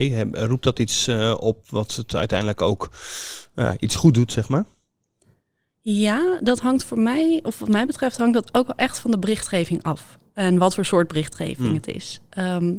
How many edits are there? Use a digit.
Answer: 0